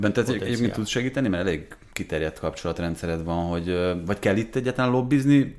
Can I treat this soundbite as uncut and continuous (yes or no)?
yes